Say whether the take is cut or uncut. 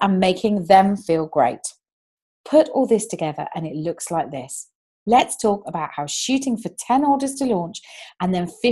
uncut